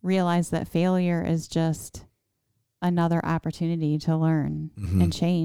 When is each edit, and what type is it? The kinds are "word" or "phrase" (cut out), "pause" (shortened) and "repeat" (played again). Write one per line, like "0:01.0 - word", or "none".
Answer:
none